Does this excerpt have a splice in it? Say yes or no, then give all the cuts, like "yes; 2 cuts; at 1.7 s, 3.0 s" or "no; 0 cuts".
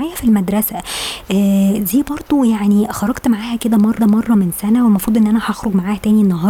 yes; 1 cut; at 4.0 s